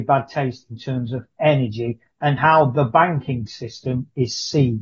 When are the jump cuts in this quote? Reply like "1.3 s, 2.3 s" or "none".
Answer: none